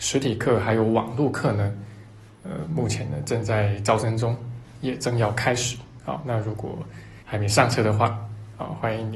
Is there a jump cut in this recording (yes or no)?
yes